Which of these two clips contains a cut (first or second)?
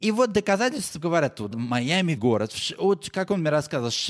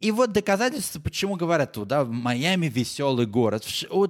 first